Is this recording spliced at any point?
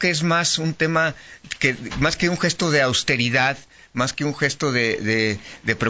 no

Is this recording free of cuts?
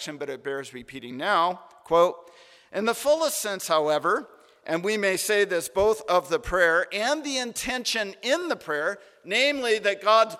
yes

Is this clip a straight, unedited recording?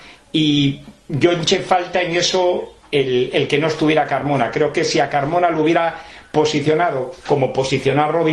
yes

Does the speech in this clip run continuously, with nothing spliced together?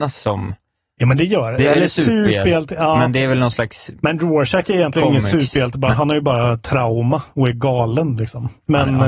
no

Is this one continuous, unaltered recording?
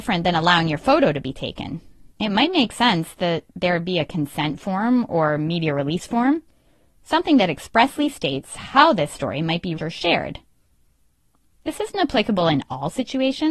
no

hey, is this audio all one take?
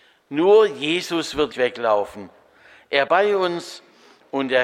no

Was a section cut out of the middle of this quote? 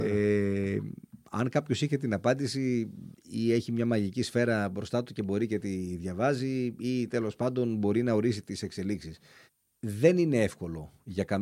yes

